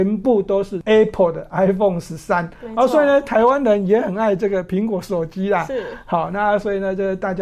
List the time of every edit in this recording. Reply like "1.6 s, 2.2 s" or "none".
none